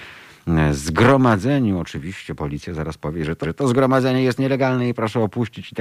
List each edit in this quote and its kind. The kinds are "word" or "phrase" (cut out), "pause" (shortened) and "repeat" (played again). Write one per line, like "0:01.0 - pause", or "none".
0:03.4 - repeat